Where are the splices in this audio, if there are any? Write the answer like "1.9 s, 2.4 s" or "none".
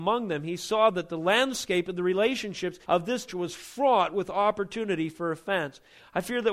2.8 s, 3.3 s